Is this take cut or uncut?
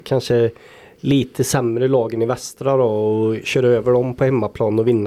uncut